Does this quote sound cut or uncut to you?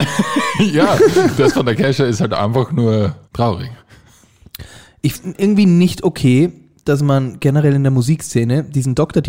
cut